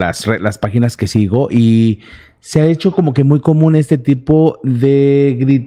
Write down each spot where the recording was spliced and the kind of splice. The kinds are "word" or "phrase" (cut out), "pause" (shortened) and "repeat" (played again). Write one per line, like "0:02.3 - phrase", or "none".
none